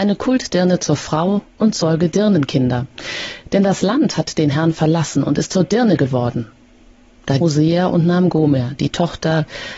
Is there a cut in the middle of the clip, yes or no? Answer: yes